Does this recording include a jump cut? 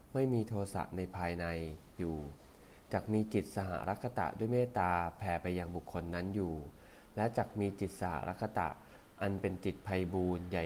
no; 0 cuts

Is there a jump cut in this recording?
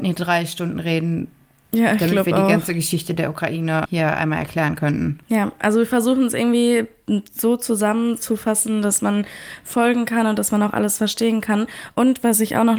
yes; 1 cut; at 3.8 s

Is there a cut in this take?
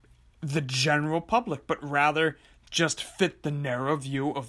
no; 0 cuts

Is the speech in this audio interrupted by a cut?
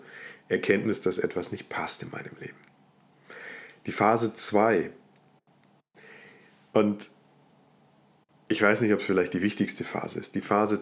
no; 0 cuts

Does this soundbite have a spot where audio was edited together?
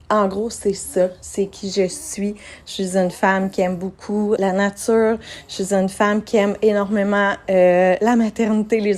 yes; 1 cut; at 4.4 s

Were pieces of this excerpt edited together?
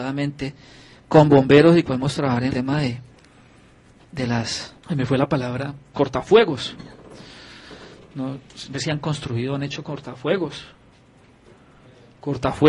yes; 5 cuts; at 1.8 s, 2.5 s, 4.8 s, 5.9 s, 8.7 s

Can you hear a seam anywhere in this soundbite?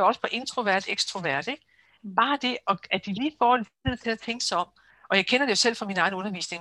no; 0 cuts

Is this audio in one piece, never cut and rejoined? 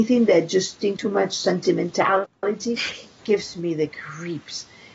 no; 2 cuts; at 1.0 s, 3.2 s

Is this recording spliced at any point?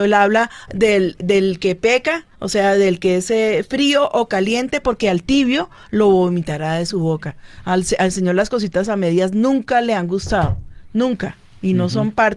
yes; 1 cut; at 2.3 s

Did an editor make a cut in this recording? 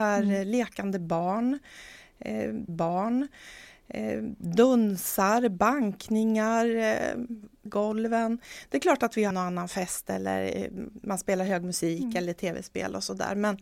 yes; 3 cuts; at 2.7 s, 7.7 s, 9.3 s

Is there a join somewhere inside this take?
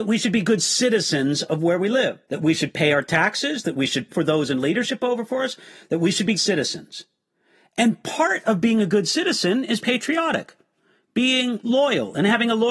yes; 4 cuts; at 2.2 s, 4.1 s, 6.4 s, 9.8 s

